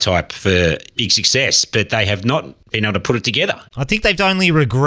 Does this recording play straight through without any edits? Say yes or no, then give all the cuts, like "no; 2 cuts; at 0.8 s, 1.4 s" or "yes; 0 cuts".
no; 1 cut; at 3.7 s